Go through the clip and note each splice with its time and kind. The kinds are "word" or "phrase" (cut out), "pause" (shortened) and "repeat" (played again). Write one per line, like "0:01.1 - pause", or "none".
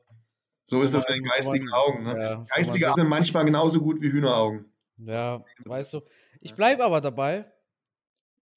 0:02.9 - word